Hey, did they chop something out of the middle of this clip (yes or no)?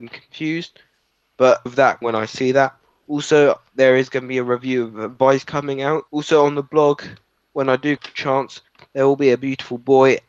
yes